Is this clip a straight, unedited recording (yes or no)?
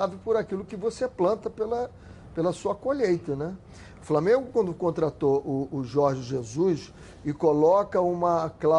yes